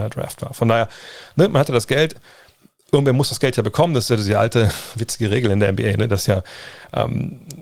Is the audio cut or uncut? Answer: uncut